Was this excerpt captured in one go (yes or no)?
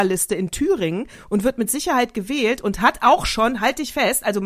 yes